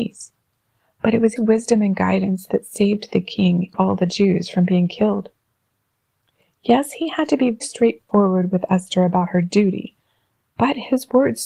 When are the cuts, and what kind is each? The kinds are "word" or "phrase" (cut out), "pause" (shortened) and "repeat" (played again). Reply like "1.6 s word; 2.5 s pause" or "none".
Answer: 1.4 s word; 3.7 s word; 7.6 s word